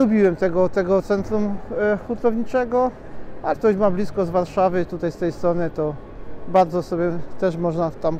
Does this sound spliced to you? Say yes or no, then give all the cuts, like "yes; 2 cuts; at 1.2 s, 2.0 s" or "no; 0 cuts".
yes; 2 cuts; at 3.5 s, 4.8 s